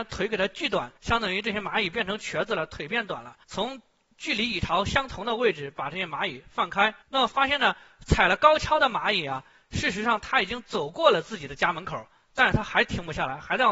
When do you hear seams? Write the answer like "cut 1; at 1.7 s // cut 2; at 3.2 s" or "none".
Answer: cut 1; at 1.0 s // cut 2; at 3.4 s // cut 3; at 7.0 s